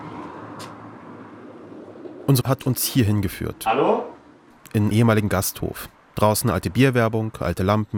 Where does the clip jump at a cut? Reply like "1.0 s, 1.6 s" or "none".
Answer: 2.4 s, 4.9 s